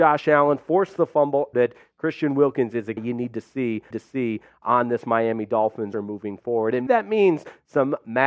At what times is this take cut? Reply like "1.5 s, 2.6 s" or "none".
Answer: 1.5 s, 3.0 s, 3.9 s, 5.9 s, 6.9 s

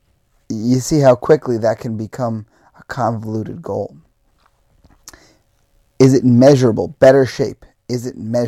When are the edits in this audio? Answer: none

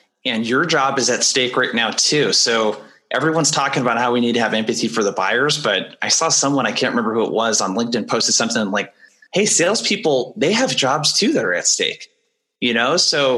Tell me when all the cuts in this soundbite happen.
none

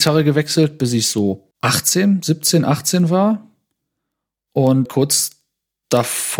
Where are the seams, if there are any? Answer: 1.5 s, 4.9 s

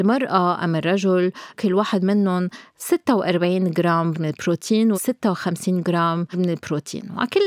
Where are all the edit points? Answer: 1.5 s, 4.1 s, 4.9 s, 6.3 s

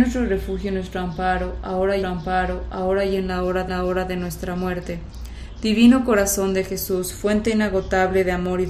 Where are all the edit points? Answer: 2.0 s, 3.7 s

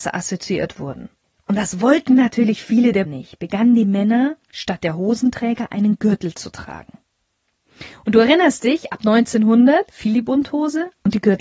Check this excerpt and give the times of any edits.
3.1 s, 4.4 s

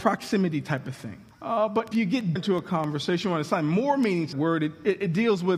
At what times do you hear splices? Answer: 1.3 s, 1.9 s, 2.4 s, 4.3 s

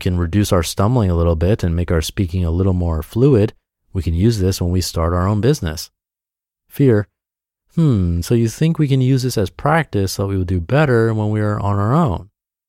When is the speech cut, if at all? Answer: none

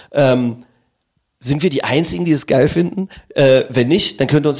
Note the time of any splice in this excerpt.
none

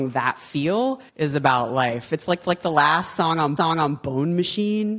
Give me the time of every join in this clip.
1.1 s, 2.4 s, 3.6 s

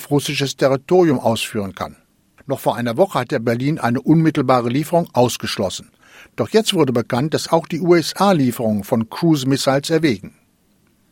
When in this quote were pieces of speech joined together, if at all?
none

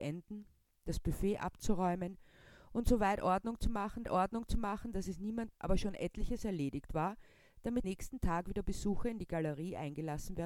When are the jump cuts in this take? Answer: 4.0 s, 5.5 s, 7.8 s

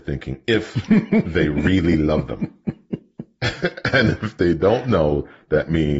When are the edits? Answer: none

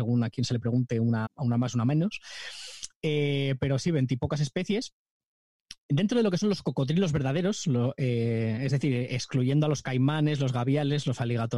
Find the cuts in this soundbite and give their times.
1.3 s, 5.8 s

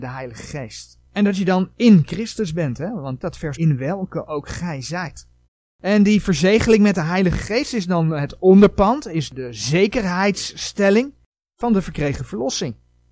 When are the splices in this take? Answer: 1.0 s, 3.2 s, 3.5 s, 5.4 s

